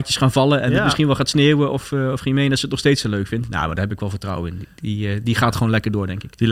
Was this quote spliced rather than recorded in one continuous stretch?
no; 0 cuts

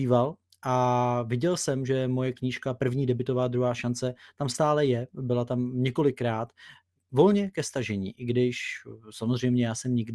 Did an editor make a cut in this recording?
no; 0 cuts

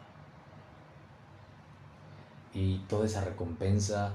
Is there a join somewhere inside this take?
no; 0 cuts

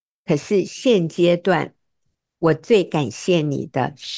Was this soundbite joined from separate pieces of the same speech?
no; 0 cuts

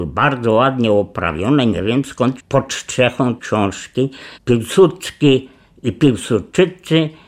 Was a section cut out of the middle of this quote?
yes; 3 cuts; at 2.4 s, 3.4 s, 4.3 s

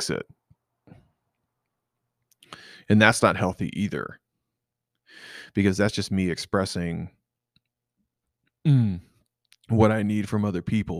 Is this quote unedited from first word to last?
yes; 0 cuts

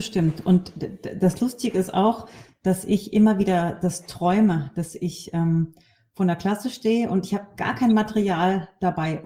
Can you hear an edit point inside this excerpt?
no; 0 cuts

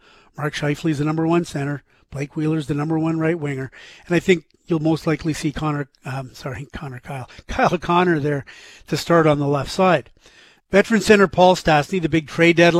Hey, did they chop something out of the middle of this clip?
no; 0 cuts

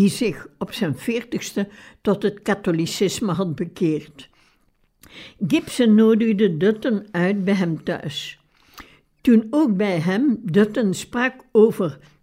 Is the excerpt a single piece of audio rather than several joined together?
yes; 0 cuts

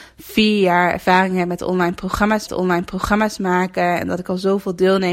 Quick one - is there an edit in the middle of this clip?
yes; 1 cut; at 2.5 s

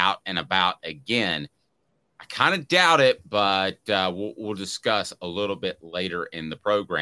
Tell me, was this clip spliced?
no; 0 cuts

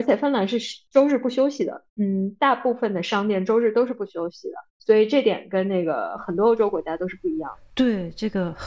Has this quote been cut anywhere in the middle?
no; 0 cuts

